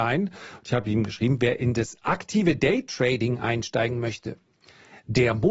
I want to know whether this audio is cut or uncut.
uncut